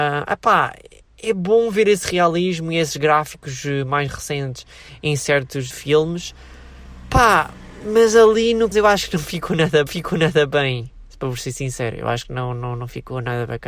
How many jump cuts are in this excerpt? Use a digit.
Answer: 3